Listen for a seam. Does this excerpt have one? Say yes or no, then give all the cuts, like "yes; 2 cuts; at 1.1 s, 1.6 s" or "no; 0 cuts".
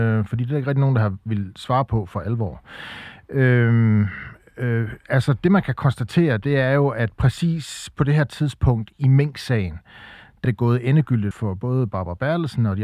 yes; 2 cuts; at 10.4 s, 11.3 s